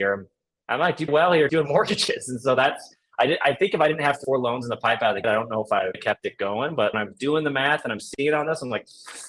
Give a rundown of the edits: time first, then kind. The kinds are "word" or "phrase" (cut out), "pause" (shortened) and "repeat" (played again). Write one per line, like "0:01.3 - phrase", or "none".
0:01.1 - word
0:01.5 - word
0:04.2 - word
0:05.2 - word
0:05.9 - word
0:06.9 - word